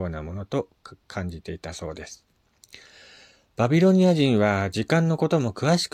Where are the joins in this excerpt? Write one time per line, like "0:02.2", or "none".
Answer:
none